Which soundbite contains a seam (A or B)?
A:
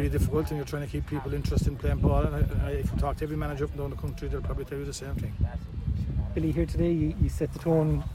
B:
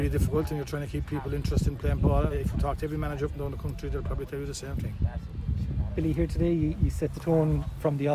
B